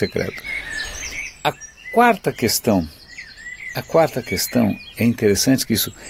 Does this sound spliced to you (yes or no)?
no